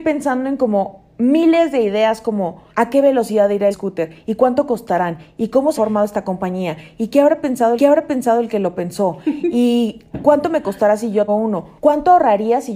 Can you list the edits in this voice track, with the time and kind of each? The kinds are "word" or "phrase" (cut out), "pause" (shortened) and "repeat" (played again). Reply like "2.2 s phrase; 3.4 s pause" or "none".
2.7 s pause; 3.7 s word; 5.8 s word; 7.8 s repeat; 11.3 s word; 11.8 s pause